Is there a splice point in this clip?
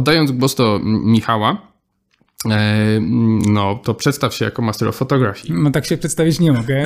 no; 0 cuts

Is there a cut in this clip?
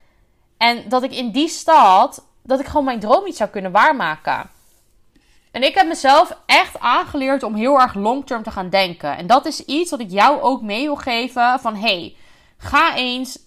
no; 0 cuts

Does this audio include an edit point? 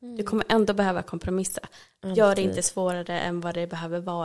no; 0 cuts

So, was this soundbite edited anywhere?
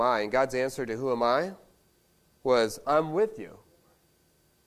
no; 0 cuts

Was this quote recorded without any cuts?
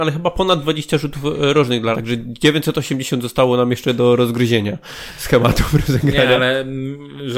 no; 1 cut; at 1.9 s

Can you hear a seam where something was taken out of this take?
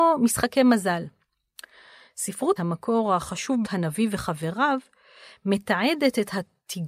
yes; 2 cuts; at 2.6 s, 3.6 s

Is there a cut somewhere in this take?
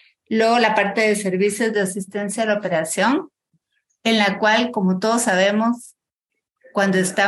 no; 0 cuts

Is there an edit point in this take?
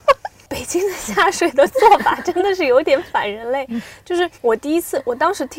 yes; 1 cut; at 4.3 s

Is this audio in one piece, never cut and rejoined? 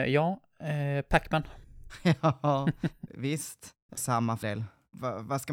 no; 4 cuts; at 1.6 s, 3.1 s, 4.0 s, 4.4 s

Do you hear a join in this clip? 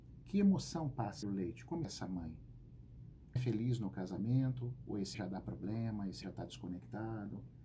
yes; 5 cuts; at 1.2 s, 1.8 s, 3.4 s, 5.1 s, 6.2 s

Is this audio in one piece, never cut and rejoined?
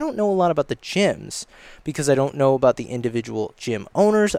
yes; 0 cuts

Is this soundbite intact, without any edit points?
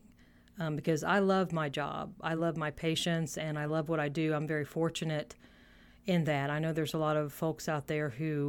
yes; 0 cuts

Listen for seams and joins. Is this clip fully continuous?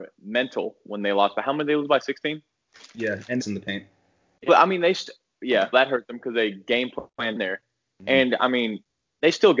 no; 4 cuts; at 3.4 s, 4.5 s, 5.7 s, 7.4 s

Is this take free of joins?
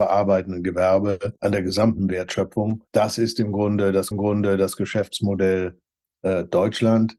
no; 3 cuts; at 1.4 s, 2.9 s, 4.1 s

